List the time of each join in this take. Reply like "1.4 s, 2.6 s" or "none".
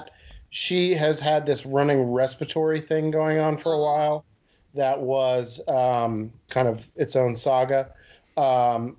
6.5 s